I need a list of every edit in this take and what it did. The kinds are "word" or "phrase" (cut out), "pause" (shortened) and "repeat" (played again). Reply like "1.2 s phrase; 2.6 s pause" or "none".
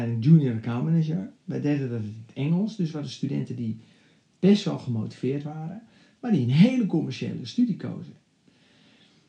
none